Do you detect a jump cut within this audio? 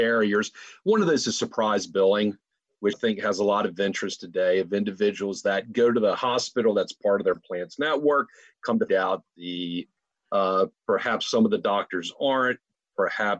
yes; 2 cuts; at 2.9 s, 8.9 s

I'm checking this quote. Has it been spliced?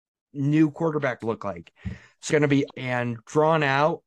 yes; 3 cuts; at 1.2 s, 2.3 s, 2.7 s

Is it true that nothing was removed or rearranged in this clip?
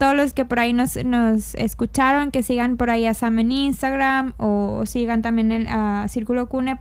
yes; 0 cuts

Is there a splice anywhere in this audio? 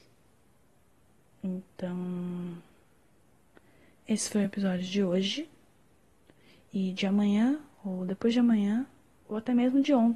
no; 0 cuts

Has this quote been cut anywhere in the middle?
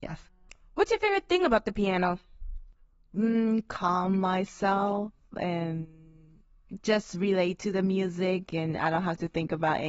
no; 0 cuts

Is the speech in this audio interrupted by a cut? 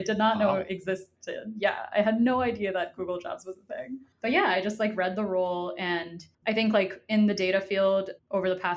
yes; 2 cuts; at 4.1 s, 6.3 s

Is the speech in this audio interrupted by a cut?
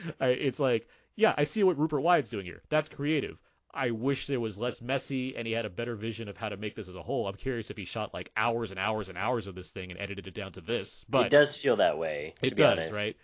no; 0 cuts

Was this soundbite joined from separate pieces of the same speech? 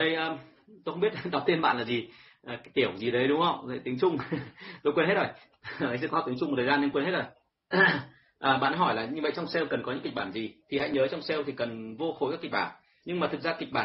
no; 0 cuts

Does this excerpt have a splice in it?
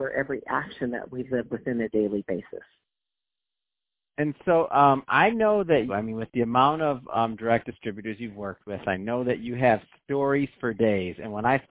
yes; 1 cut; at 5.9 s

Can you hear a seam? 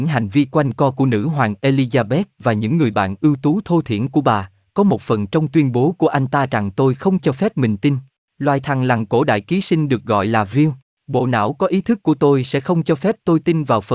yes; 3 cuts; at 7.2 s, 8.2 s, 10.8 s

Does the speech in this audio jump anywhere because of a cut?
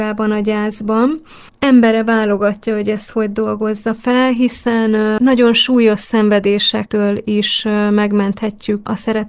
no; 0 cuts

